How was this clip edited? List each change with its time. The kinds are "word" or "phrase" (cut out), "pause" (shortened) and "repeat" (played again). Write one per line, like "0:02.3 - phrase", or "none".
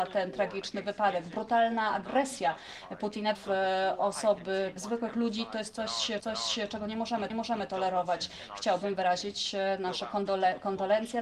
0:03.3 - word
0:04.8 - word
0:06.2 - repeat
0:07.3 - repeat